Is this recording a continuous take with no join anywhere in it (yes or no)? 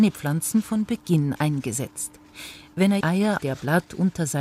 no